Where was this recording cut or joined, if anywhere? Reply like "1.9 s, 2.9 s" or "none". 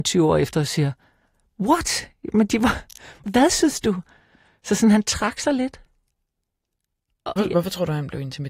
3.2 s, 7.4 s